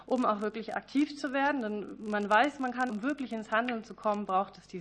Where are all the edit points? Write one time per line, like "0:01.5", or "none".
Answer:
0:02.9